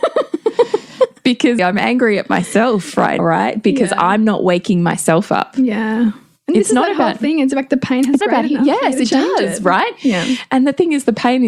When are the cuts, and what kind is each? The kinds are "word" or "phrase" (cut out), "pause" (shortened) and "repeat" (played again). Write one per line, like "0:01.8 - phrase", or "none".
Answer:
0:01.6 - word
0:03.2 - word
0:08.2 - word